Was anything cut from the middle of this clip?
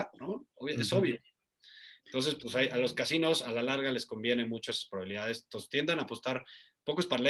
no; 0 cuts

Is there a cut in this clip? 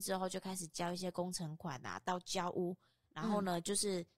no; 0 cuts

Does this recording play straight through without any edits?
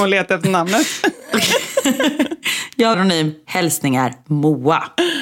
no; 1 cut; at 2.9 s

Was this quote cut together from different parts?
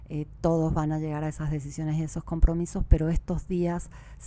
no; 0 cuts

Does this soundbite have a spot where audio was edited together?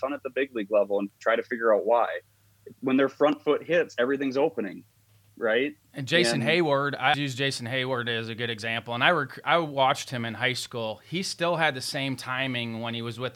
yes; 2 cuts; at 2.7 s, 7.1 s

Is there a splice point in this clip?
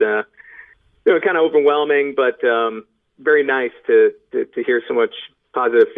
no; 0 cuts

